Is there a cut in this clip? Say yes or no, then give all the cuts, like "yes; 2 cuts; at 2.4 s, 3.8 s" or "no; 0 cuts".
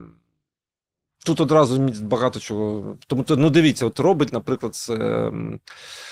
yes; 1 cut; at 4.3 s